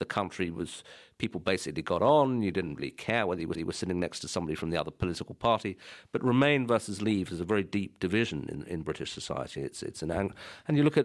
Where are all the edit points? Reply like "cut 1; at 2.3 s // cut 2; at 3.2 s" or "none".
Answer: cut 1; at 3.5 s

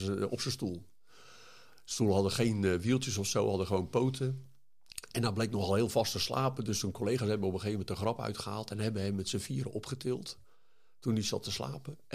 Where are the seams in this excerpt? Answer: none

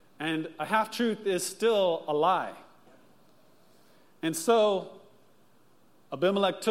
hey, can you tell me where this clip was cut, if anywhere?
none

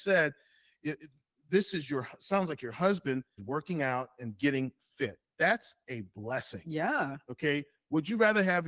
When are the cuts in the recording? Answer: cut 1; at 3.4 s

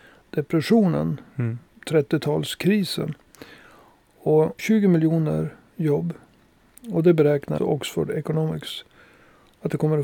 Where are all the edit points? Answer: cut 1; at 4.6 s // cut 2; at 7.6 s

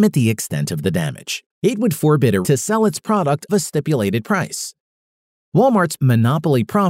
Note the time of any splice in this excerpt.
cut 1; at 1.5 s // cut 2; at 2.4 s // cut 3; at 3.5 s // cut 4; at 6.0 s

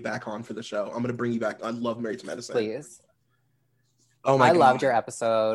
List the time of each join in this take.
none

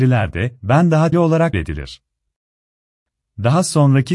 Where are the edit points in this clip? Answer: cut 1; at 1.1 s // cut 2; at 1.5 s

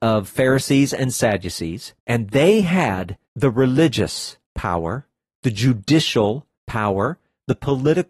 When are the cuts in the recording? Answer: cut 1; at 2.0 s // cut 2; at 3.2 s // cut 3; at 4.4 s // cut 4; at 6.5 s

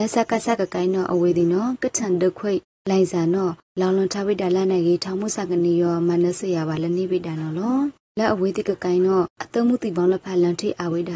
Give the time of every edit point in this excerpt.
none

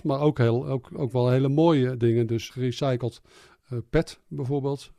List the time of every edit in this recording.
cut 1; at 2.5 s

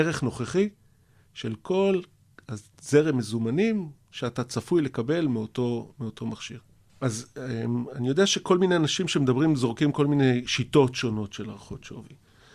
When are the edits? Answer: none

